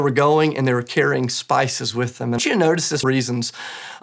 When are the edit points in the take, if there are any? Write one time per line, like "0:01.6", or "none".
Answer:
0:02.4
0:03.0